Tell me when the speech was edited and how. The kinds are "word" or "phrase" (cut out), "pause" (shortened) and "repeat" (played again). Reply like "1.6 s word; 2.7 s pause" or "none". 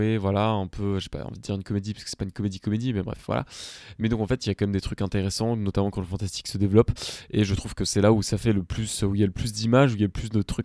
none